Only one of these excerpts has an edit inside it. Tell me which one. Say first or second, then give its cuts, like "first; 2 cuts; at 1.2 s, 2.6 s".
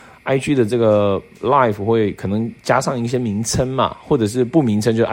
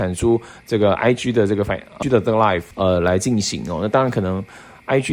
second; 2 cuts; at 2.0 s, 2.7 s